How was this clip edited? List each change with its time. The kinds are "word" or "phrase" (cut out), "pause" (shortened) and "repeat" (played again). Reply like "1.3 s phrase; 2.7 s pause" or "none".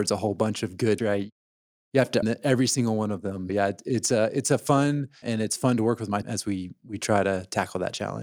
1.0 s word; 2.2 s word; 3.5 s word; 5.2 s word; 6.2 s word